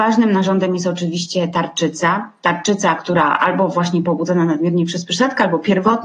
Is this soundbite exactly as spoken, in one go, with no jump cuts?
yes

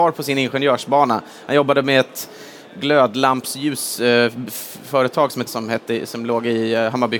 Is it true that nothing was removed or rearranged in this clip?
no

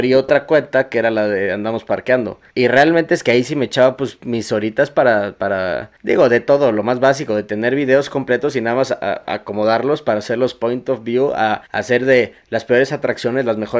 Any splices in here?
yes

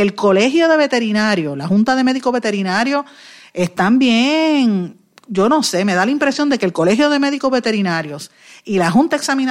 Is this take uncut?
yes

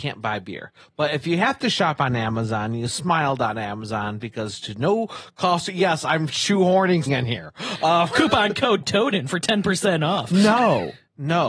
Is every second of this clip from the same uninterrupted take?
no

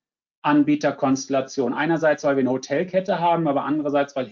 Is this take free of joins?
yes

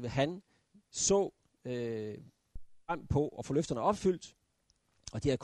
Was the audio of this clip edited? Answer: no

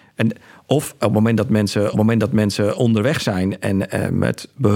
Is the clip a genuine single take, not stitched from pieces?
no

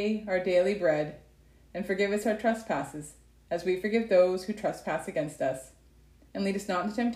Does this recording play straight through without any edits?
yes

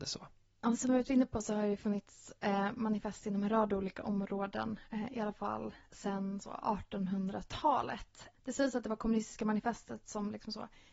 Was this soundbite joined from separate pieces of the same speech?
no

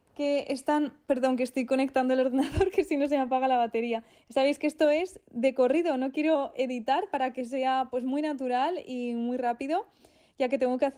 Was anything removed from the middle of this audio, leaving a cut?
no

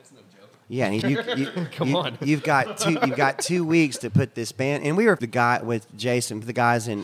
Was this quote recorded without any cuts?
no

